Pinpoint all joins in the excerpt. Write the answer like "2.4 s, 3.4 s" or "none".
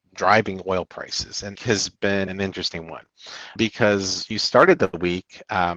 1.6 s, 2.3 s, 3.6 s, 4.3 s